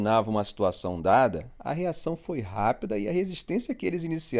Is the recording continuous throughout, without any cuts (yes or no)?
yes